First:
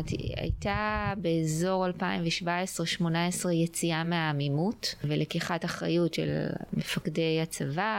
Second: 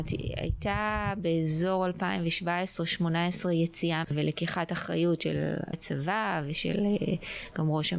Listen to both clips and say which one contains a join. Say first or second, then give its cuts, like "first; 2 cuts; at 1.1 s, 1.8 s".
second; 2 cuts; at 4.0 s, 5.7 s